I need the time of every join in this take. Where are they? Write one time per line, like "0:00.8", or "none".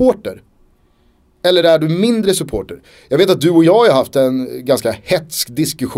none